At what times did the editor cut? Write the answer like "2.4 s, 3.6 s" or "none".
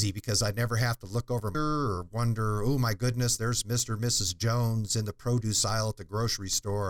1.5 s